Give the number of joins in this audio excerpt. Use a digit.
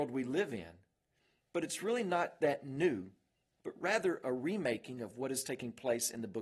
0